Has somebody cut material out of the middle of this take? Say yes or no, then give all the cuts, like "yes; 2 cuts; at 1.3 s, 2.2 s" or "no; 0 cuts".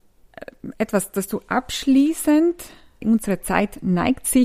no; 0 cuts